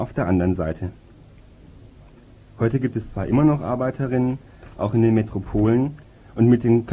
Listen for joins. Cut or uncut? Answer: uncut